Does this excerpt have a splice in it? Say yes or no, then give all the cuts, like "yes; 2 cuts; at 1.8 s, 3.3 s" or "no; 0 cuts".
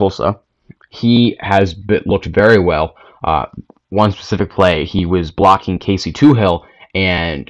no; 0 cuts